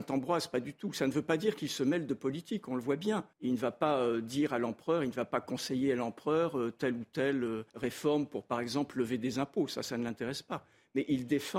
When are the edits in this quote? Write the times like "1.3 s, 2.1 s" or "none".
3.3 s, 7.7 s

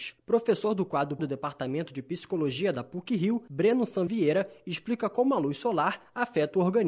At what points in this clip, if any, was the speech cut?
1.2 s, 4.1 s

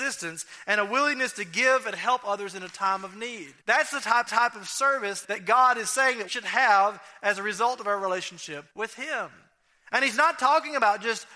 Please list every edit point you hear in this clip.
3.6 s, 4.3 s, 5.2 s, 6.3 s, 8.7 s

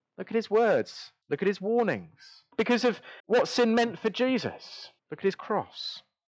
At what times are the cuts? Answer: 1.2 s, 2.5 s, 3.2 s, 5.0 s

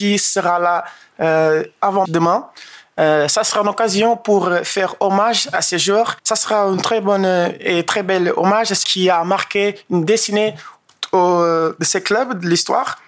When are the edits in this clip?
2.0 s, 6.2 s, 8.8 s

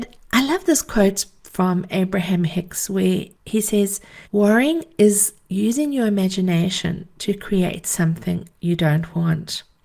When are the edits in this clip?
3.3 s, 4.2 s

